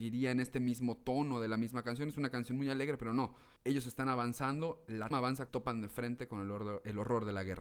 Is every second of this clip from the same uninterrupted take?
no; 3 cuts; at 3.6 s, 5.1 s, 5.5 s

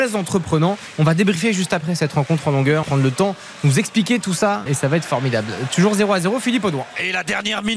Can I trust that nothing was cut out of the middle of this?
no; 2 cuts; at 2.8 s, 4.7 s

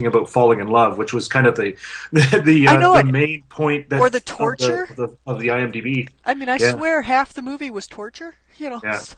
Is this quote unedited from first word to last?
yes; 0 cuts

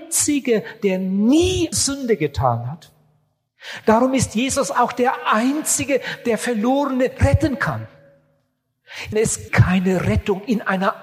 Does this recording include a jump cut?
yes; 3 cuts; at 1.7 s, 9.1 s, 9.5 s

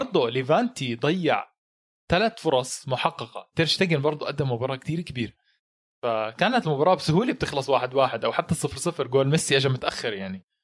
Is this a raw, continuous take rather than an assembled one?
yes; 0 cuts

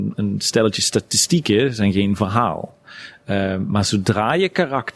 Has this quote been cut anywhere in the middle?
no; 0 cuts

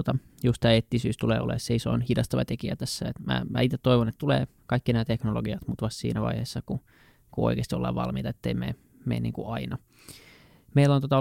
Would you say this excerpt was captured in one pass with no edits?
yes; 0 cuts

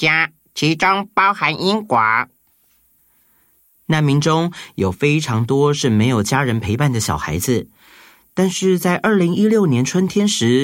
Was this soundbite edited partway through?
no; 0 cuts

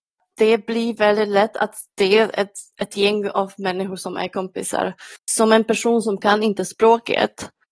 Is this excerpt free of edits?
yes; 0 cuts

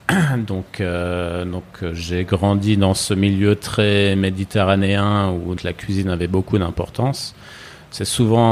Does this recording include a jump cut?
yes; 1 cut; at 5.6 s

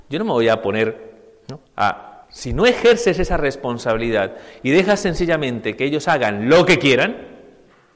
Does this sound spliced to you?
yes; 2 cuts; at 1.7 s, 2.2 s

